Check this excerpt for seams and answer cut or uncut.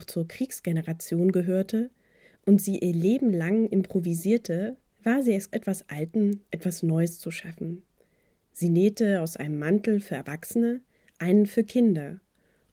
cut